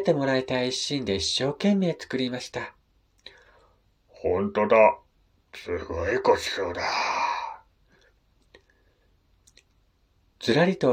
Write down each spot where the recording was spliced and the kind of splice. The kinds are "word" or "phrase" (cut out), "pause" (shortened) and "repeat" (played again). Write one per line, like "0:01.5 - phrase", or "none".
none